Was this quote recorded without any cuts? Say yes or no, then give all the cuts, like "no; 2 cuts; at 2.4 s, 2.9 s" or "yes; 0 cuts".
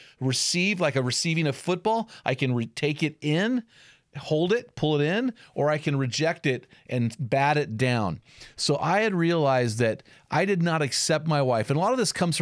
yes; 0 cuts